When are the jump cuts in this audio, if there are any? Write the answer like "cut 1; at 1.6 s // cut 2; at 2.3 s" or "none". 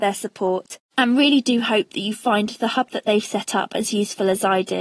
none